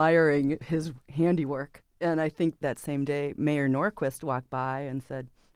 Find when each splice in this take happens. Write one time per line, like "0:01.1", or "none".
0:02.6